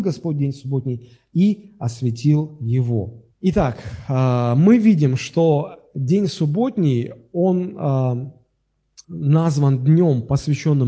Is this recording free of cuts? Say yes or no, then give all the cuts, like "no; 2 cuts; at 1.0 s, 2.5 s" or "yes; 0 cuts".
no; 2 cuts; at 3.3 s, 9.0 s